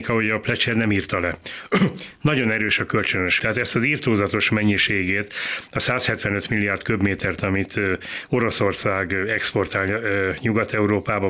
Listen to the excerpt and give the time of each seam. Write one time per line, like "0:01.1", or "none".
0:03.4